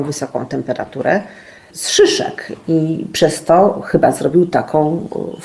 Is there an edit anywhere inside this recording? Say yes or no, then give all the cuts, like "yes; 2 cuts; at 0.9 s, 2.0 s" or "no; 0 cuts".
no; 0 cuts